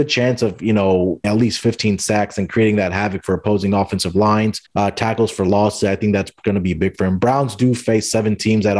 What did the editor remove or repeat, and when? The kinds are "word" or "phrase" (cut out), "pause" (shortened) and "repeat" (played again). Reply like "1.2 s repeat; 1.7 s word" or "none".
1.2 s word; 4.7 s pause